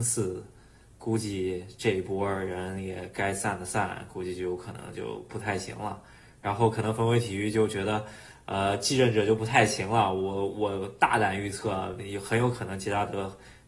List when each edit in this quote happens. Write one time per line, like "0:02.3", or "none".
none